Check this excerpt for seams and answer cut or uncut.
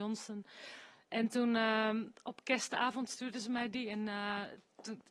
uncut